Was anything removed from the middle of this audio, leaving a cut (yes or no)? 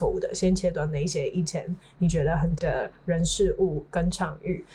yes